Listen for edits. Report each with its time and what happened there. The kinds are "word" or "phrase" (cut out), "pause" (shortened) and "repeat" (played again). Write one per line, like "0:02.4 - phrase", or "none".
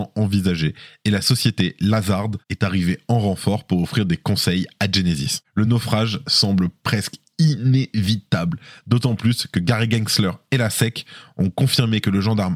none